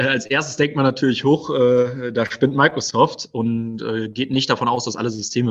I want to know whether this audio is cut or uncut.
uncut